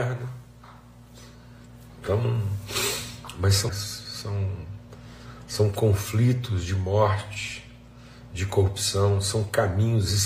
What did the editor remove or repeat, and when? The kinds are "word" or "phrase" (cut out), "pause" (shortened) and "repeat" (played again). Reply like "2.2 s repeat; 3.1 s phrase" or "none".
3.7 s word

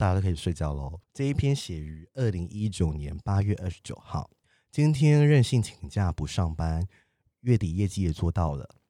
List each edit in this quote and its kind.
1.0 s pause; 4.4 s pause

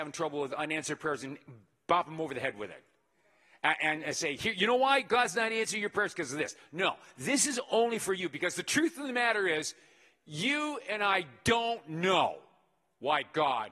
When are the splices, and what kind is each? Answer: none

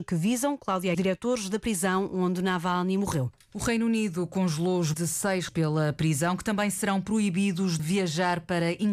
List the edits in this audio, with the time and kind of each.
0.9 s phrase; 4.9 s word; 5.5 s word; 7.8 s word

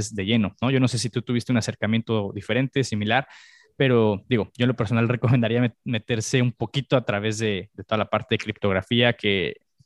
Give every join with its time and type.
none

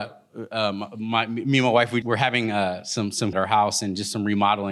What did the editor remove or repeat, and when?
2.0 s word; 3.3 s phrase

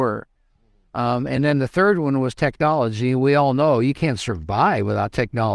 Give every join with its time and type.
none

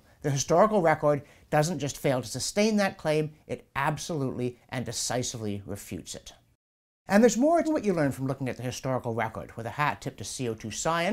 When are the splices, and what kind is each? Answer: 7.6 s word

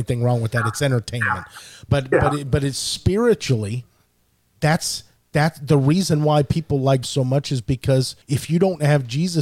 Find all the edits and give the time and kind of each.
1.9 s word; 7.0 s phrase; 8.2 s pause

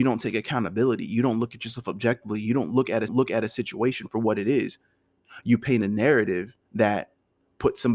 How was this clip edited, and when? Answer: 3.1 s repeat; 6.6 s pause

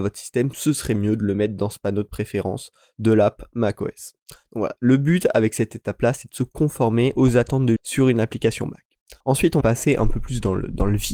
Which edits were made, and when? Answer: 7.8 s word; 9.2 s pause; 9.6 s word

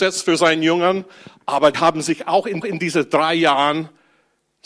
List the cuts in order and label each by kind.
1.7 s word; 2.6 s repeat

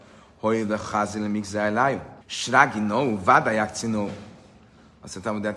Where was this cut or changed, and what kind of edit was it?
2.2 s pause

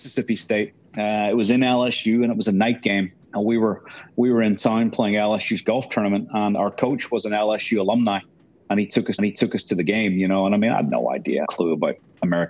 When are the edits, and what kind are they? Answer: 3.2 s pause; 9.2 s repeat; 11.4 s phrase

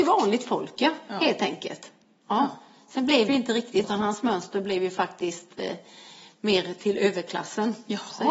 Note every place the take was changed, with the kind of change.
3.3 s word; 3.8 s word

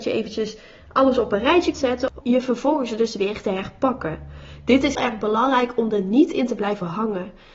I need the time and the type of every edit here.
1.7 s word; 2.2 s word; 4.9 s word

